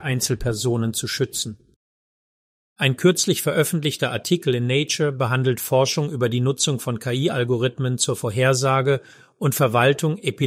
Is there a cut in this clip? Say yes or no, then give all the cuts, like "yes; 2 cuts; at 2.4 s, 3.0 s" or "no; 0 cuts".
no; 0 cuts